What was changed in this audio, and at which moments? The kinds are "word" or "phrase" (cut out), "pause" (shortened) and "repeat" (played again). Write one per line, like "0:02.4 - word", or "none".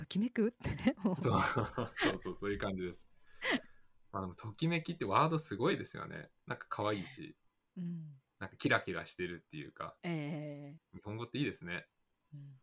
0:10.0 - pause
0:10.8 - word